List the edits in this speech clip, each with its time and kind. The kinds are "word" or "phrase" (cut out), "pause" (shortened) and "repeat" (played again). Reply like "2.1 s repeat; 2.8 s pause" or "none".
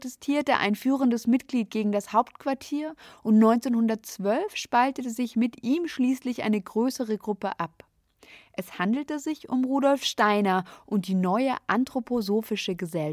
none

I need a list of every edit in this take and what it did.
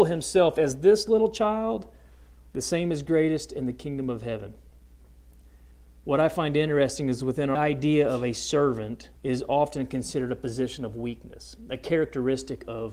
7.5 s phrase; 9.2 s pause

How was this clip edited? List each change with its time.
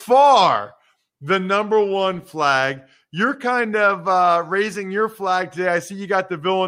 none

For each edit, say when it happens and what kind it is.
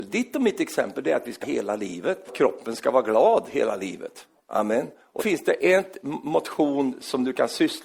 1.4 s word; 2.3 s word; 4.4 s pause; 5.2 s word

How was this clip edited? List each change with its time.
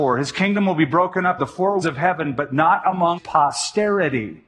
1.4 s phrase; 1.8 s word; 3.2 s word

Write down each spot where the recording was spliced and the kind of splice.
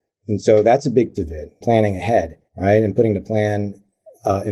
1.1 s word; 1.6 s word; 2.5 s pause

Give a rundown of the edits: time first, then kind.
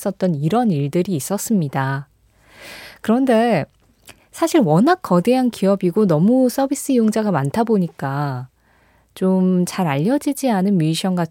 none

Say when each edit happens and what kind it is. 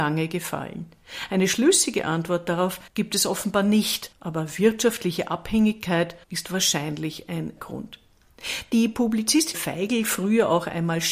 2.9 s pause; 4.1 s pause; 6.2 s pause; 7.6 s word; 9.5 s word

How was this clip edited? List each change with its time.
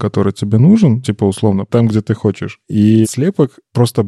1.0 s word; 1.7 s word; 3.0 s word

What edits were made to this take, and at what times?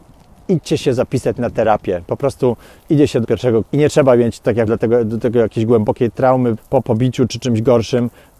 3.2 s word; 3.6 s word; 4.7 s word; 6.6 s word

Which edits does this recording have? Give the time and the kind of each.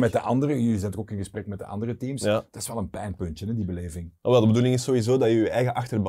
none

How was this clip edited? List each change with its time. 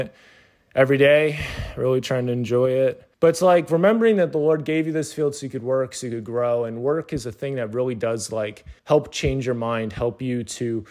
3.1 s pause; 8.8 s pause

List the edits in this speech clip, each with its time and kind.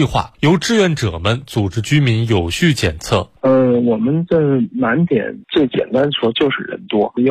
5.4 s pause

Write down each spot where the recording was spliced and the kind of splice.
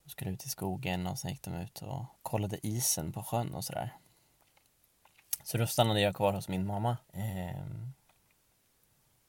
2.2 s pause; 7.0 s pause

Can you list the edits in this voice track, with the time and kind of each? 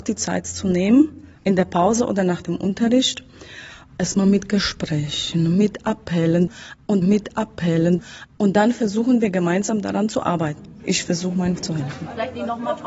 1.3 s pause; 7.0 s repeat; 11.6 s word

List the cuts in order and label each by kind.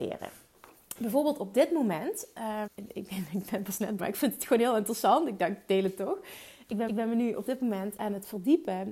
2.7 s word; 4.0 s word; 6.9 s repeat; 8.0 s word

